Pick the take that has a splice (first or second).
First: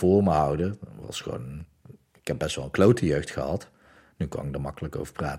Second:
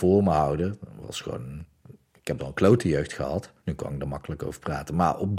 second